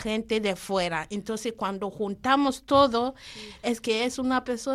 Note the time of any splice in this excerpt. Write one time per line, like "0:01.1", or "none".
none